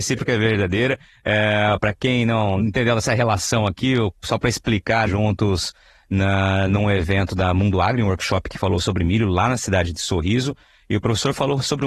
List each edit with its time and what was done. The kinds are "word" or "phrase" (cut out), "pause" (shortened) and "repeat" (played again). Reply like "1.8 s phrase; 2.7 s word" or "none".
5.1 s phrase